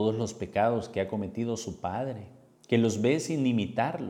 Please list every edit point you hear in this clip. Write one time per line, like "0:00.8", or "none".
0:02.5